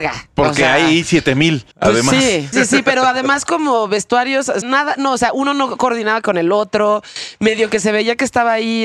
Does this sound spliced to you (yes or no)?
yes